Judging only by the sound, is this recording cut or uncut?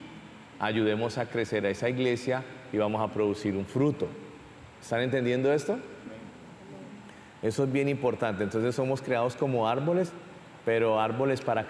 uncut